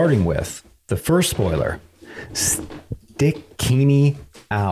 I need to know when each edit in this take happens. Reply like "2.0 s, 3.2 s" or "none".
none